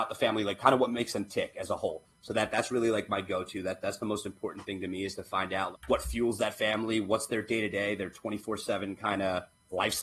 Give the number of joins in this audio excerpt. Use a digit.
1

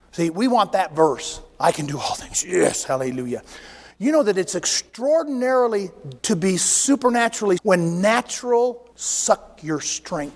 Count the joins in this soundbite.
3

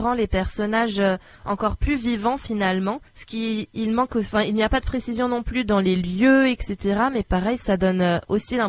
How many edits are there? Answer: 1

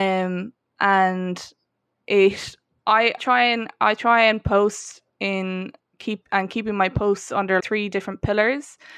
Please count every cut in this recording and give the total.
3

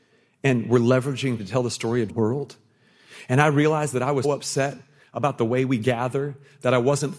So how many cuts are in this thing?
3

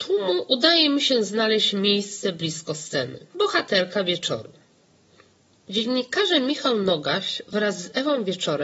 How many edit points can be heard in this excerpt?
1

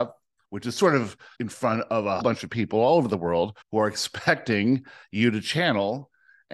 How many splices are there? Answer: 3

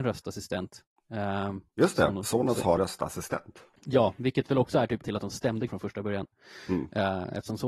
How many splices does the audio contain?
5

